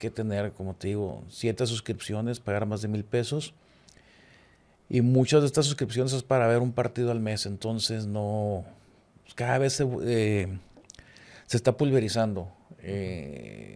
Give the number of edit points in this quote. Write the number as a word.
zero